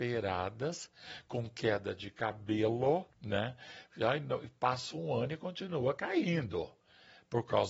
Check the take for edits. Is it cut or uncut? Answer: cut